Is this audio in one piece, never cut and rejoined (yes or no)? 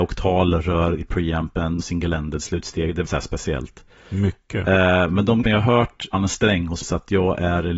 no